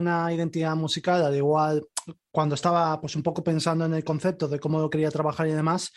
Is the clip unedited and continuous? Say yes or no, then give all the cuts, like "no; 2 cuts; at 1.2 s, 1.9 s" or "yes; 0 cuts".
yes; 0 cuts